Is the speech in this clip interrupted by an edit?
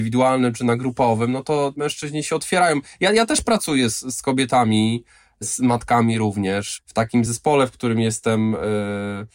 no; 0 cuts

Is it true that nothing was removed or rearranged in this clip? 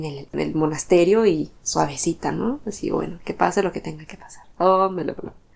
no; 2 cuts; at 1.6 s, 4.5 s

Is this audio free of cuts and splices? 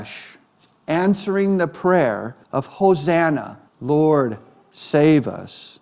no; 2 cuts; at 2.4 s, 3.7 s

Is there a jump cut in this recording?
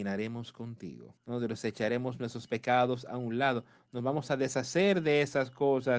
yes; 1 cut; at 1.2 s

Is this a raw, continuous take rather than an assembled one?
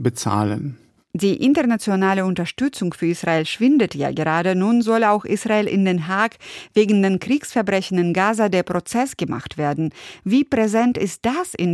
yes; 0 cuts

